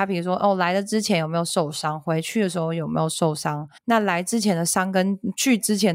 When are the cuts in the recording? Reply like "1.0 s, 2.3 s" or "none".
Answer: 3.8 s

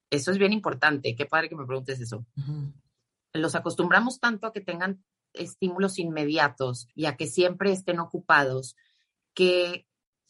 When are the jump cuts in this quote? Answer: 6.9 s

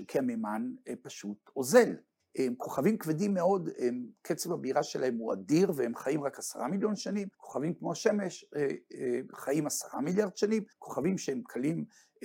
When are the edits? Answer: 2.2 s, 7.3 s, 10.7 s

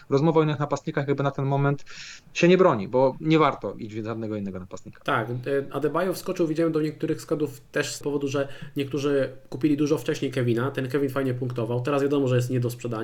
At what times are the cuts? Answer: 8.0 s

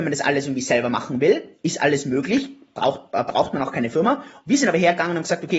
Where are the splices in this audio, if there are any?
none

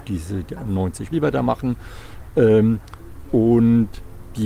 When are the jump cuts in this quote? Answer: 1.1 s

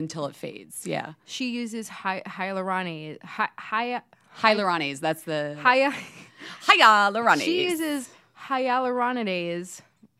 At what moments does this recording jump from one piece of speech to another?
none

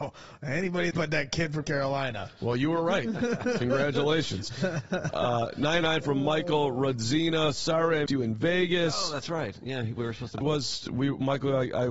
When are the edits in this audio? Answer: 0.9 s, 1.6 s, 5.8 s, 8.1 s, 10.4 s

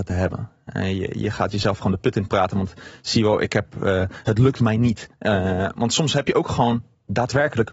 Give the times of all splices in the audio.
5.1 s

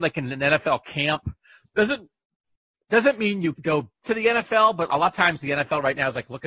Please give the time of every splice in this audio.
3.6 s, 4.0 s, 4.9 s

